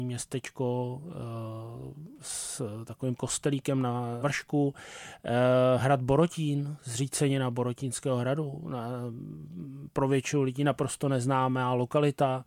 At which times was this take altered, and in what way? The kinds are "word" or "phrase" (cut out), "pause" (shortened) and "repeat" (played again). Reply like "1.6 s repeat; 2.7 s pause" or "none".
3.2 s word; 4.2 s word